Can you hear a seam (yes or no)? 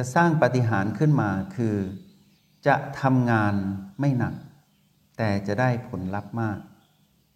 no